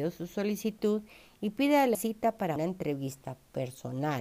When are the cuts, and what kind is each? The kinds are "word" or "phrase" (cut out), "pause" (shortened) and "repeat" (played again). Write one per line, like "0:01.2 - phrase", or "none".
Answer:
0:01.9 - word
0:02.6 - word